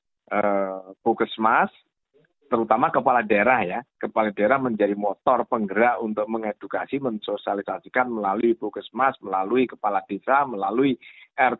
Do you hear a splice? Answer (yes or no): no